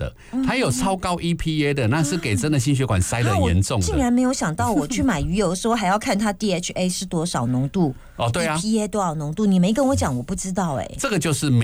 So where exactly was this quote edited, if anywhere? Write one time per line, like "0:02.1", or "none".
none